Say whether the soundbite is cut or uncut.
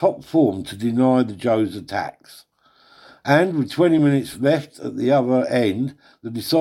uncut